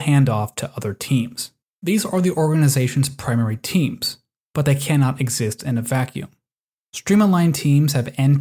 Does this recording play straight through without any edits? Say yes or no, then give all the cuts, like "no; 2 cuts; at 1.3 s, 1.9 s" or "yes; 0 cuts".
yes; 0 cuts